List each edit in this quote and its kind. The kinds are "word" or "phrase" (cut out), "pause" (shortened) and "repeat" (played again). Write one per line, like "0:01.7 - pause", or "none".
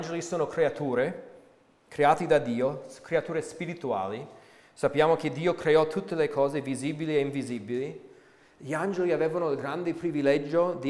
none